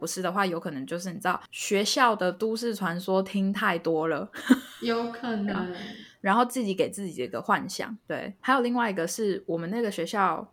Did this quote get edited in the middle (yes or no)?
no